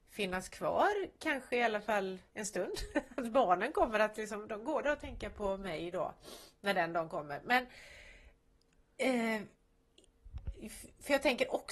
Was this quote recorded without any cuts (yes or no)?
no